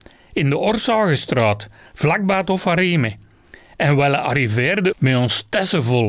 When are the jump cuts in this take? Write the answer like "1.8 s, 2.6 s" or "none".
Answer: 4.9 s